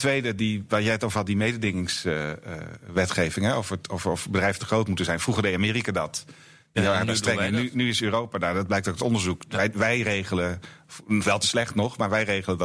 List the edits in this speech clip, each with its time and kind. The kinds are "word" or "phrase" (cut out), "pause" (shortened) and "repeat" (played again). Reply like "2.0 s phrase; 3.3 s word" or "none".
none